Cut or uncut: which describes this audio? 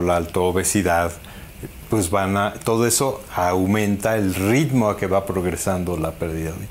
uncut